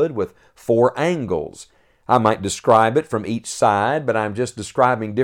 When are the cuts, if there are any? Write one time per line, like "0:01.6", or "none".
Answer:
none